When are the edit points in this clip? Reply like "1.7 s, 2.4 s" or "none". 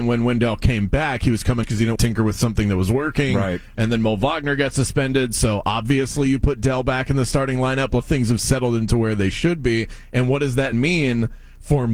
1.6 s, 2.0 s, 8.0 s, 10.7 s